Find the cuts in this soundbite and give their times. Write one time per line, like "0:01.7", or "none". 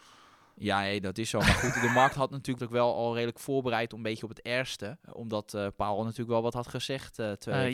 0:02.6
0:05.0